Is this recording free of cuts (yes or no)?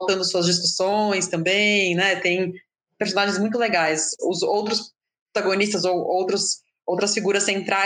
yes